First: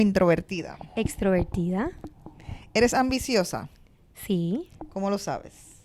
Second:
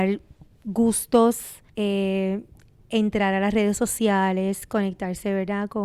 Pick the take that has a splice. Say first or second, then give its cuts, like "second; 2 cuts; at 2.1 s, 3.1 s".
second; 1 cut; at 1.7 s